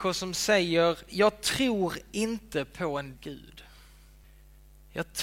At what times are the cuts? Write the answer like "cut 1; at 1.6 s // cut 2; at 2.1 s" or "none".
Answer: cut 1; at 3.1 s